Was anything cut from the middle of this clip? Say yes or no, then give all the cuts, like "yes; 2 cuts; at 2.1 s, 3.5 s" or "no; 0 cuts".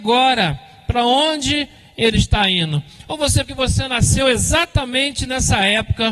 yes; 1 cut; at 3.4 s